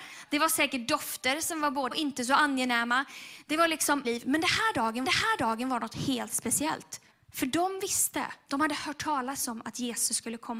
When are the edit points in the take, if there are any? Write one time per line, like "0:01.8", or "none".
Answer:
0:01.9
0:04.0
0:05.0
0:07.1